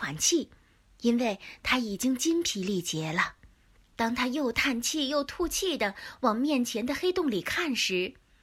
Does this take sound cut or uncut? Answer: uncut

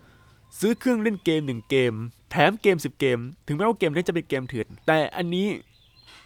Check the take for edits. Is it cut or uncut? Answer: cut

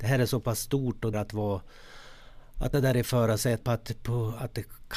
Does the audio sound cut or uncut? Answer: cut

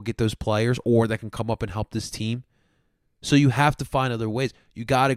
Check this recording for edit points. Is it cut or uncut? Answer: uncut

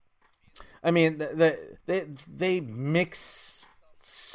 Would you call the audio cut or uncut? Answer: cut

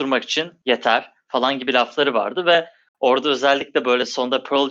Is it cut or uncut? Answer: uncut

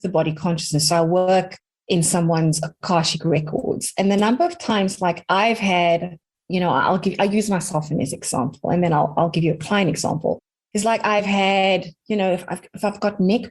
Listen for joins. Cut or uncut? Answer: uncut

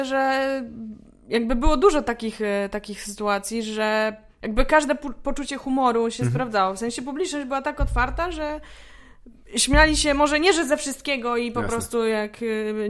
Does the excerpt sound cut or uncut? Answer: uncut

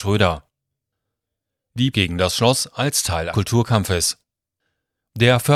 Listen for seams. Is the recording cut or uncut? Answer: cut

